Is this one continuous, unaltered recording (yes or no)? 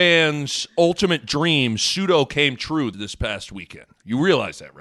no